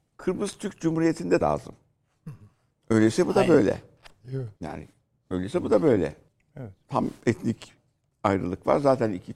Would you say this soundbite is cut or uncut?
cut